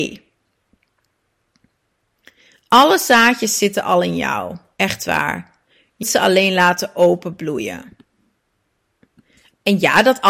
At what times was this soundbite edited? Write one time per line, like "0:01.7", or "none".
0:06.0